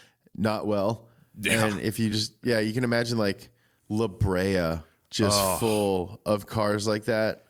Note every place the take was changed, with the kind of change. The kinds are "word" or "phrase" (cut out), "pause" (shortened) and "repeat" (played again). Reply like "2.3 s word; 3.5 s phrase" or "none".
none